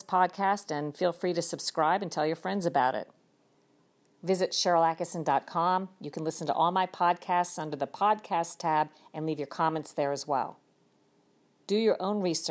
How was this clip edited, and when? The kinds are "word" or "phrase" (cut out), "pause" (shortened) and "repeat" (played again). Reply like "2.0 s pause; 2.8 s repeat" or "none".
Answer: none